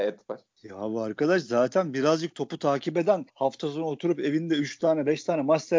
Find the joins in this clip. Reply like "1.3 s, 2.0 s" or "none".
3.3 s

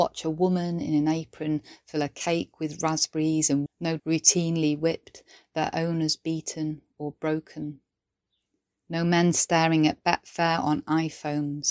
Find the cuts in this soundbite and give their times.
3.7 s, 4.0 s

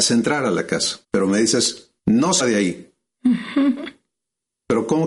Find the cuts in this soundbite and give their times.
1.0 s, 2.0 s, 2.4 s

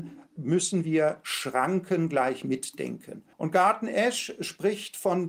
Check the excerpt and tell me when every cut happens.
3.3 s

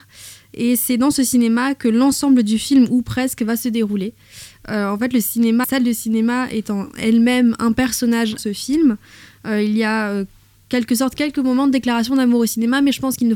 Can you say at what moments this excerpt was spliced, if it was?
5.6 s, 8.4 s, 10.6 s

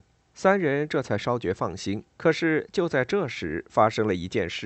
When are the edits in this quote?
2.1 s

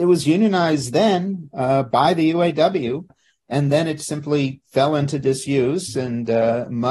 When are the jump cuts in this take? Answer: none

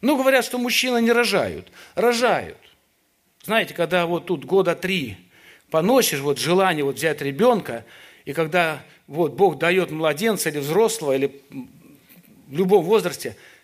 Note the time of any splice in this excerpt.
none

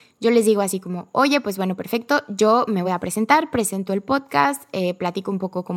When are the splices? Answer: none

